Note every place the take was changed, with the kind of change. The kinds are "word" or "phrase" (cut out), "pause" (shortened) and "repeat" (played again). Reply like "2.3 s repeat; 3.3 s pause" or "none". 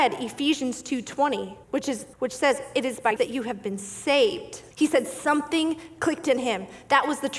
1.6 s pause; 2.1 s pause; 3.2 s word; 4.7 s pause